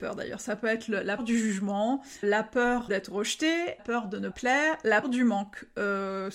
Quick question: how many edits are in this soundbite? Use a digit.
6